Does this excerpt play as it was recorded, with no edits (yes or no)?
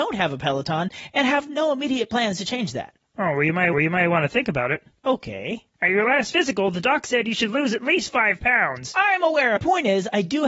no